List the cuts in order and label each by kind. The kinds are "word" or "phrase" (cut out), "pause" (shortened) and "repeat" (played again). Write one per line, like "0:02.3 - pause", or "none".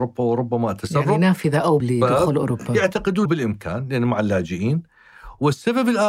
0:01.8 - word
0:03.2 - word